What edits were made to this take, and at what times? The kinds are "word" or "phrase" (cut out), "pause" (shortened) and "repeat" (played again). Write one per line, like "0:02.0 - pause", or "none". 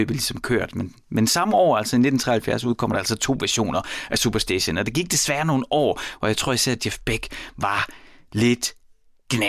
none